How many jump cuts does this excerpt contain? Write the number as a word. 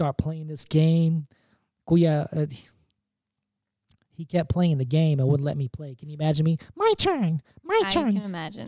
zero